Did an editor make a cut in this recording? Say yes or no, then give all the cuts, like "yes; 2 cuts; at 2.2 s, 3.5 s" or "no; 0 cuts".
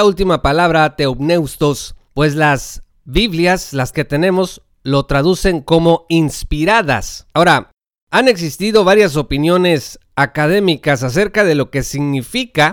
yes; 1 cut; at 3.9 s